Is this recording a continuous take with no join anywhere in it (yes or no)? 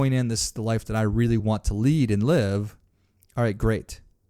yes